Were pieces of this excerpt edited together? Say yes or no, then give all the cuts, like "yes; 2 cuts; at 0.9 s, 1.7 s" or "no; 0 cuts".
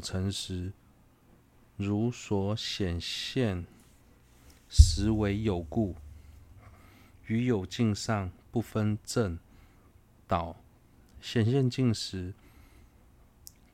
no; 0 cuts